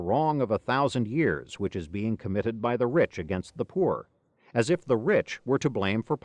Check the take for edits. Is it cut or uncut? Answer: uncut